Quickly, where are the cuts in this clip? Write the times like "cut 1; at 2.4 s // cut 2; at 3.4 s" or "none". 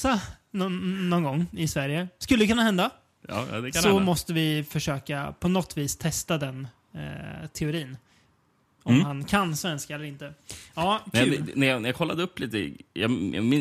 none